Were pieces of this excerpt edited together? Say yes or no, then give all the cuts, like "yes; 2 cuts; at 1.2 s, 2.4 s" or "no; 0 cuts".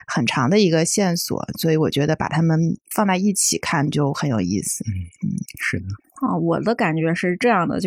no; 0 cuts